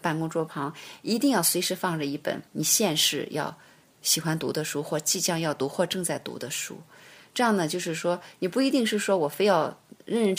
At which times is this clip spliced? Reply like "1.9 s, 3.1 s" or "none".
2.5 s